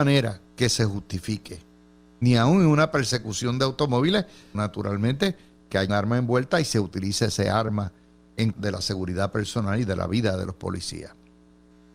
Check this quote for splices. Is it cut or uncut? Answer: cut